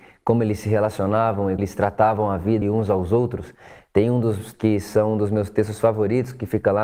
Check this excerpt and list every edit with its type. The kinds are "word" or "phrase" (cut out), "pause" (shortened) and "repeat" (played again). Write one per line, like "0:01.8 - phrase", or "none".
0:01.6 - word
0:02.6 - word
0:04.5 - word